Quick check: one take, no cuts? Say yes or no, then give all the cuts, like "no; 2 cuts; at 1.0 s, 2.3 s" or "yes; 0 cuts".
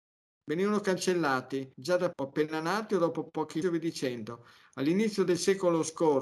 no; 3 cuts; at 1.7 s, 2.1 s, 3.6 s